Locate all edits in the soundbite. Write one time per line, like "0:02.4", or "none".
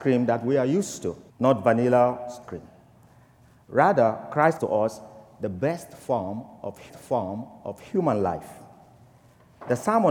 0:01.3
0:02.4
0:04.6
0:06.9